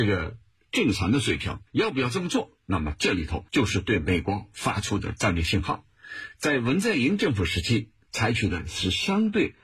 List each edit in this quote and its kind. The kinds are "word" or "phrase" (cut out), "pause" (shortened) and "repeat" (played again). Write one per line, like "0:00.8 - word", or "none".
0:01.7 - pause
0:03.5 - pause